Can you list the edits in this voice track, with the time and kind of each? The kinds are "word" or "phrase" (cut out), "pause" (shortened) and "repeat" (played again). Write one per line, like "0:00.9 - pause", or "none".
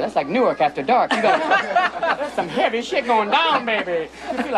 0:01.4 - word